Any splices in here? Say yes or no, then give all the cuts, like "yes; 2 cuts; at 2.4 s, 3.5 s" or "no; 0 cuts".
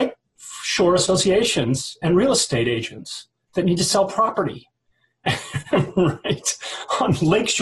no; 0 cuts